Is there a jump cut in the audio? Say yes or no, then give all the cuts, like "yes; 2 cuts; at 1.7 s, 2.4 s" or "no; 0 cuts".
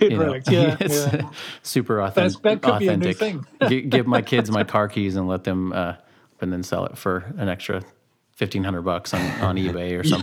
yes; 1 cut; at 6.4 s